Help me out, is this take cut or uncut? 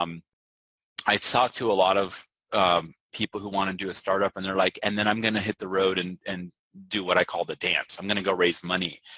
uncut